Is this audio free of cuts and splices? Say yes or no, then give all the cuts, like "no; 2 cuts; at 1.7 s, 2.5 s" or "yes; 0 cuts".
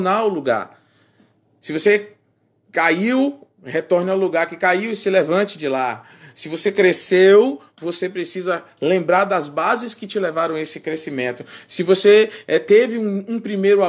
yes; 0 cuts